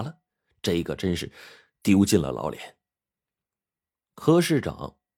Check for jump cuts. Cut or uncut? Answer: uncut